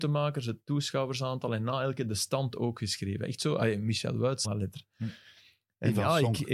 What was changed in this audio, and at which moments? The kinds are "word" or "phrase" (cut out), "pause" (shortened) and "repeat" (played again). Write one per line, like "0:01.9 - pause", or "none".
0:04.4 - word